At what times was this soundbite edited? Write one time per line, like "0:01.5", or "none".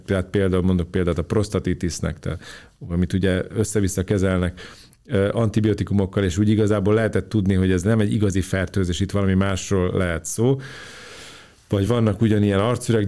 none